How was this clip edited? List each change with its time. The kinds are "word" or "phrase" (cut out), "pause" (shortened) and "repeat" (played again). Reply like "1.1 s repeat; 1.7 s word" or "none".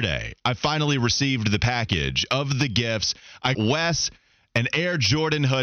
3.5 s word